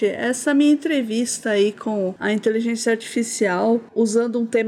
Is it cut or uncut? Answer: uncut